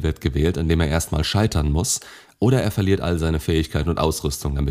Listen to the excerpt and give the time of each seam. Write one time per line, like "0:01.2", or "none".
none